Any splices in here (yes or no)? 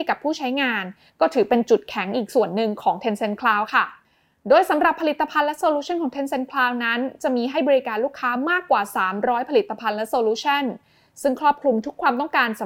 no